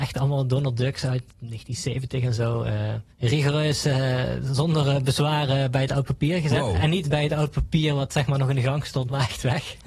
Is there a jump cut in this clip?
yes; 2 cuts; at 1.3 s, 3.1 s

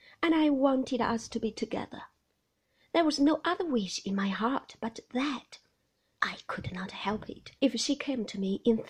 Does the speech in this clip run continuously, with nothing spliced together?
no; 1 cut; at 7.6 s

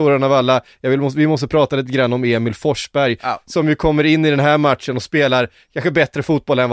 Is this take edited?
no; 0 cuts

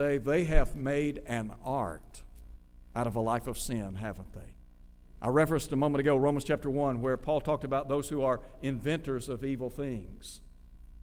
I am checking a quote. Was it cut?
no; 0 cuts

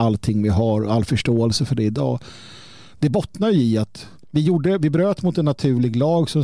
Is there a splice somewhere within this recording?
yes; 1 cut; at 4.2 s

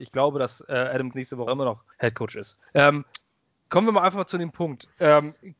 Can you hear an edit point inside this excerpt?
yes; 4 cuts; at 1.1 s, 1.5 s, 1.9 s, 2.7 s

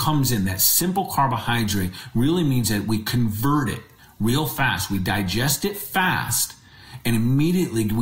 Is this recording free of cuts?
yes; 0 cuts

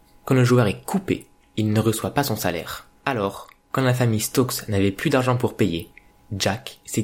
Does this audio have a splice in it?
yes; 1 cut; at 3.0 s

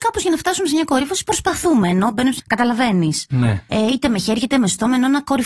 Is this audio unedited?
no; 1 cut; at 2.4 s

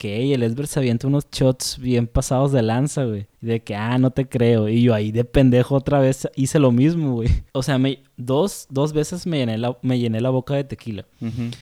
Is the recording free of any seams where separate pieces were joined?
no; 2 cuts; at 3.4 s, 7.5 s

